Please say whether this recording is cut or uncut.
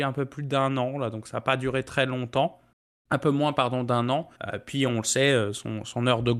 cut